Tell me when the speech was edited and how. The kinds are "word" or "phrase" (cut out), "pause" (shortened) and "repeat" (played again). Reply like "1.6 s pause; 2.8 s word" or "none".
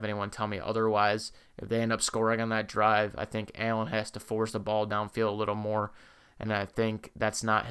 none